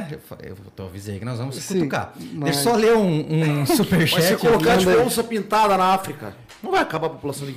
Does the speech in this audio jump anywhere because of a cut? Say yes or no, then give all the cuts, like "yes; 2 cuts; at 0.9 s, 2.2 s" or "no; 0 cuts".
no; 0 cuts